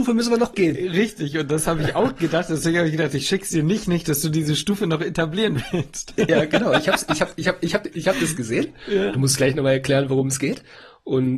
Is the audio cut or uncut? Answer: uncut